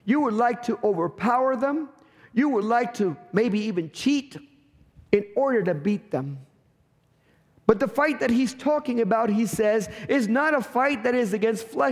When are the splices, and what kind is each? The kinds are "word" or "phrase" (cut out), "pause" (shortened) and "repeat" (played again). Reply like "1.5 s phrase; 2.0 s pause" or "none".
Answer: none